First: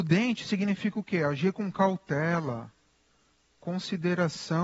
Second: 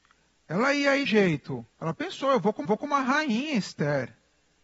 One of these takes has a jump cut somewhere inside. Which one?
second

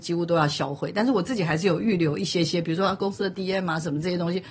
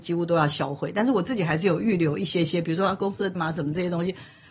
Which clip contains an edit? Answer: second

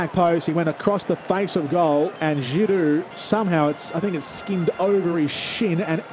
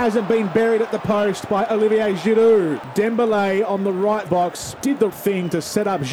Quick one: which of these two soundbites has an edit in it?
second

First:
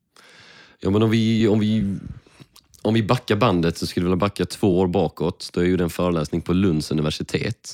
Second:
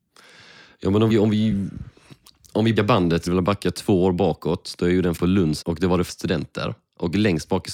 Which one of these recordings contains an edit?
second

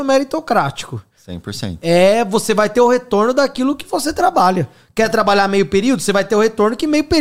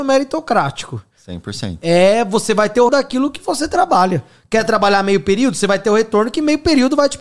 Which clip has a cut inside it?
second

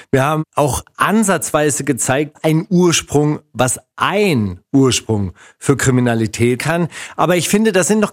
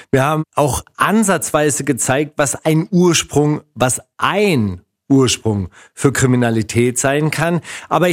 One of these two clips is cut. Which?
first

